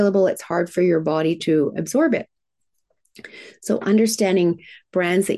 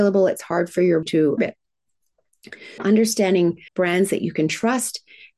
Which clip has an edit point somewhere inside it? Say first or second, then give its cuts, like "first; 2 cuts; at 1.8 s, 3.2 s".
second; 4 cuts; at 1.0 s, 1.4 s, 2.8 s, 3.7 s